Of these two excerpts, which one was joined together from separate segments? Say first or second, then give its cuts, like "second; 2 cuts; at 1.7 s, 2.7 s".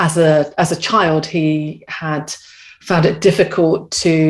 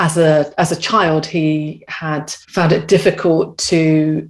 second; 1 cut; at 2.4 s